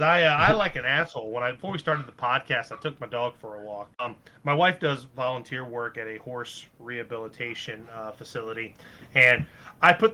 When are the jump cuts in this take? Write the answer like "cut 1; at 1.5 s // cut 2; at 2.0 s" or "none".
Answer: cut 1; at 3.9 s